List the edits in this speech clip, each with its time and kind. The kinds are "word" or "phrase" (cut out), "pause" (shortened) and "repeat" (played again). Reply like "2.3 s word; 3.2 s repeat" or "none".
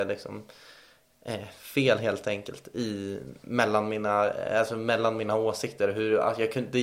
none